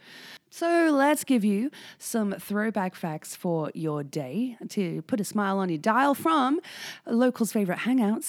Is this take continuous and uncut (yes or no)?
yes